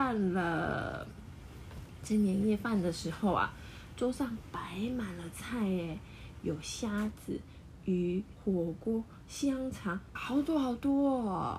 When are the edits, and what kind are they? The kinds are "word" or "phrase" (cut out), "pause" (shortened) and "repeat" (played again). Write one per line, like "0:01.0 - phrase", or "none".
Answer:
0:08.4 - phrase
0:10.2 - word